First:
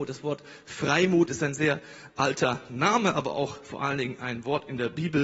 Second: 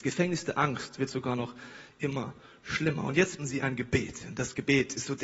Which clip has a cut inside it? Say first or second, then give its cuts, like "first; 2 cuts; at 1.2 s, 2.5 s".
second; 1 cut; at 3.4 s